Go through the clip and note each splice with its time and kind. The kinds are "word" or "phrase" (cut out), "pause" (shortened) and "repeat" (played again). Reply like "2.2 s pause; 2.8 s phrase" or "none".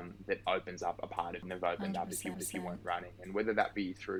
2.3 s repeat